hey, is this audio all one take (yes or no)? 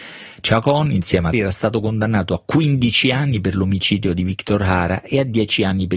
no